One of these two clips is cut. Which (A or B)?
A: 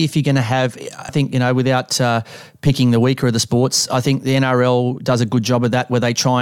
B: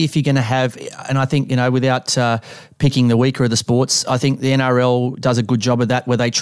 A